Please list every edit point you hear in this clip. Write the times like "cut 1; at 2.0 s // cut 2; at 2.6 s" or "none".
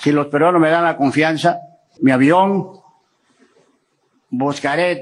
cut 1; at 2.0 s

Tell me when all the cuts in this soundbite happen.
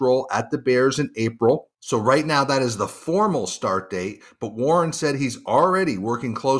none

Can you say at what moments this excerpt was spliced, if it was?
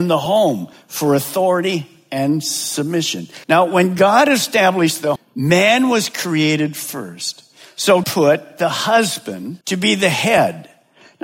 cut 1; at 3.4 s // cut 2; at 5.2 s // cut 3; at 8.0 s // cut 4; at 9.6 s

